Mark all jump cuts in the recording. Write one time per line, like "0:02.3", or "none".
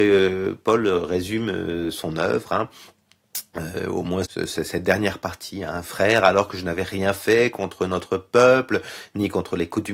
0:04.2